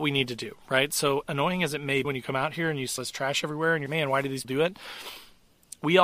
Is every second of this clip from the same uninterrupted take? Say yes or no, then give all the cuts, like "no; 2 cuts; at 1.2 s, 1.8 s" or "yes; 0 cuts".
no; 5 cuts; at 1.2 s, 2.0 s, 3.0 s, 3.9 s, 4.4 s